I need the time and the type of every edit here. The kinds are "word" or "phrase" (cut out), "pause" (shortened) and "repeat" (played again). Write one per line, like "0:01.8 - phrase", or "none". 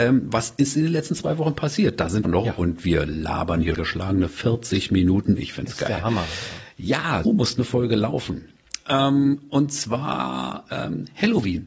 0:02.2 - phrase
0:03.7 - word
0:07.2 - word